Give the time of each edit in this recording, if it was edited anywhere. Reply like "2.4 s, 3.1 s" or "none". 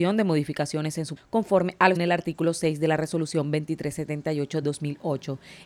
1.2 s, 2.0 s, 4.6 s